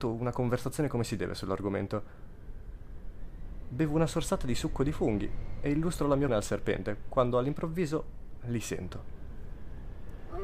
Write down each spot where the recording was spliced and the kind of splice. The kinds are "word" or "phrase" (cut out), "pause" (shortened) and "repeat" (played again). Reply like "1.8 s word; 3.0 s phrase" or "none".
6.3 s word